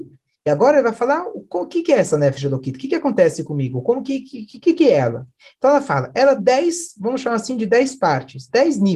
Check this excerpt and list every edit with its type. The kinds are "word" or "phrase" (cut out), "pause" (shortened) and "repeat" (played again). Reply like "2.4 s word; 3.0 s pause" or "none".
6.4 s word